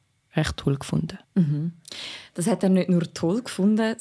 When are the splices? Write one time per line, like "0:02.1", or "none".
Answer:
0:01.2